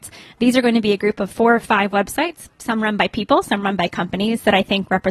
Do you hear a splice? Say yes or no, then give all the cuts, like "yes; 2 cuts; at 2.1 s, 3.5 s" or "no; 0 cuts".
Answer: no; 0 cuts